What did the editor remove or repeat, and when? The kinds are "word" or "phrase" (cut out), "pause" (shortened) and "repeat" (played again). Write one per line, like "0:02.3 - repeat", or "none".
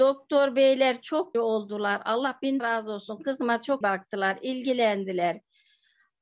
0:01.3 - word
0:02.6 - word
0:03.8 - word